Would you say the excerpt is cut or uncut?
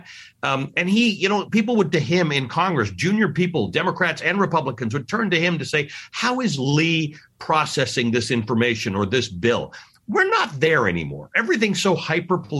cut